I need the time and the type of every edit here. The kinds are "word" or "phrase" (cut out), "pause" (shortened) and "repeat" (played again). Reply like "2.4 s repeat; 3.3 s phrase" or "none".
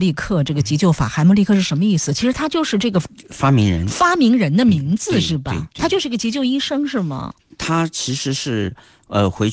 7.5 s pause